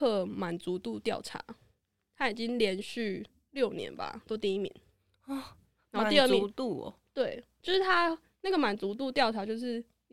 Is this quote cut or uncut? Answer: uncut